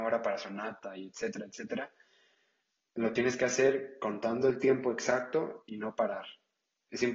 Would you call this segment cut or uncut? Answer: uncut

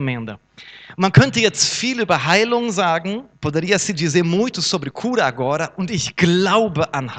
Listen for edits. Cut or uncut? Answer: cut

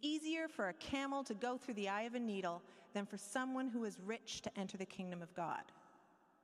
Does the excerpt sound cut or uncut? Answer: uncut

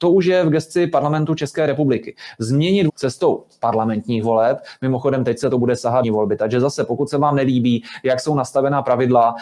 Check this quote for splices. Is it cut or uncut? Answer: cut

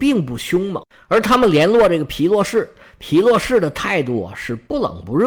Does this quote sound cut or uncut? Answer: uncut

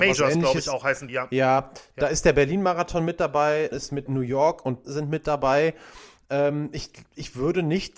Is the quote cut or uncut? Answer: cut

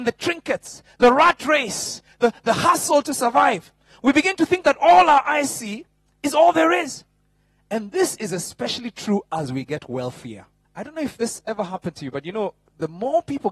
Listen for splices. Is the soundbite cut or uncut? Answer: cut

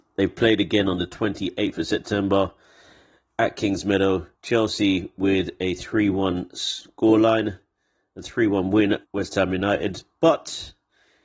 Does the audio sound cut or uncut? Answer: cut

